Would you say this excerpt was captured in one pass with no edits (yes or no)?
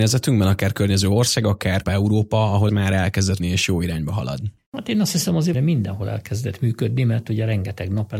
no